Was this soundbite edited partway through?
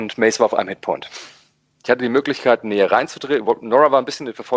no; 0 cuts

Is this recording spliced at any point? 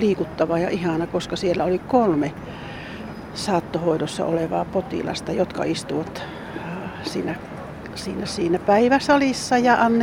no; 0 cuts

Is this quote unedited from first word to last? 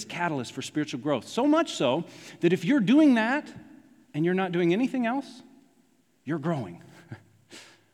yes; 0 cuts

